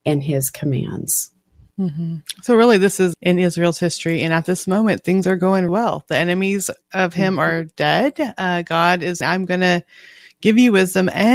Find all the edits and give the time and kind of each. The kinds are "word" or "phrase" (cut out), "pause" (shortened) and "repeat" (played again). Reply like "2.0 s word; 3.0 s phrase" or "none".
3.1 s phrase; 5.7 s word; 9.2 s word